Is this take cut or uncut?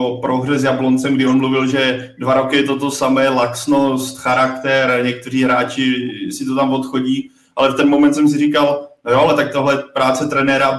uncut